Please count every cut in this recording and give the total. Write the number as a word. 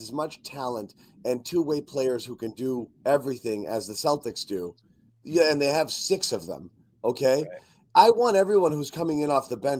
zero